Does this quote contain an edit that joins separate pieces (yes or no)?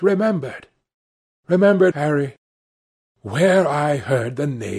yes